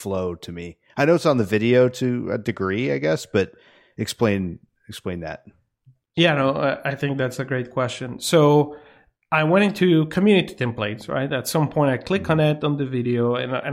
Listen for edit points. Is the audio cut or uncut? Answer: uncut